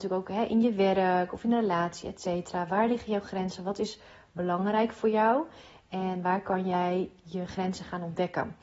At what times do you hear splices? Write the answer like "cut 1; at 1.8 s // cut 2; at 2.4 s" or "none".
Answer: none